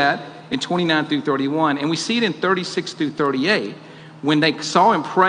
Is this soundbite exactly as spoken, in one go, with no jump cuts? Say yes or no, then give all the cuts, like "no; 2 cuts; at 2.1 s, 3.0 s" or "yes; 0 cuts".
yes; 0 cuts